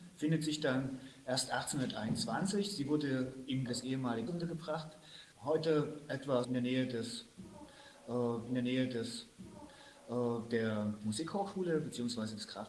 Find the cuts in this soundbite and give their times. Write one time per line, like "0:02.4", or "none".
0:03.7
0:04.3
0:05.3
0:06.4
0:08.5